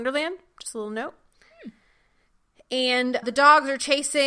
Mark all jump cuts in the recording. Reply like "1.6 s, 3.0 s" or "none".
3.2 s